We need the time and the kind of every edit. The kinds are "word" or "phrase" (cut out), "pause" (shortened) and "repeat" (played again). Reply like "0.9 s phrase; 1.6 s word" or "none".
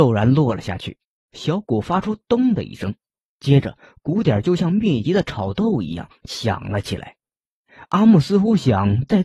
none